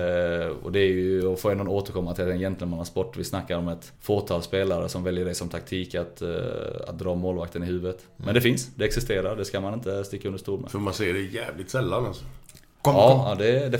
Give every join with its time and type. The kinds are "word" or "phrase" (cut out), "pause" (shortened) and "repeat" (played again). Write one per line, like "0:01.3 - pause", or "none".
0:03.9 - pause